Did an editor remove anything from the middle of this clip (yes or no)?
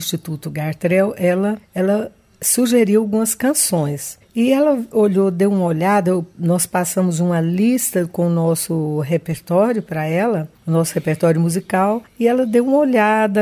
no